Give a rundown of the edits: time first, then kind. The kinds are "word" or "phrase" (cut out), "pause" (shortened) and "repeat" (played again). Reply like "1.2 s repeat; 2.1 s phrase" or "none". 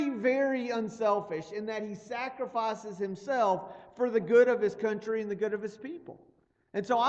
none